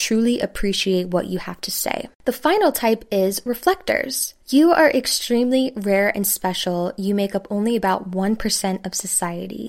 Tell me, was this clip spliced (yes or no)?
yes